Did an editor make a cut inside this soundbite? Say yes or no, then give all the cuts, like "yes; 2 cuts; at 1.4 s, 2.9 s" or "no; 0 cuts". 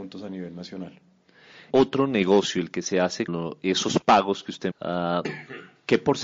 yes; 3 cuts; at 1.7 s, 3.3 s, 4.7 s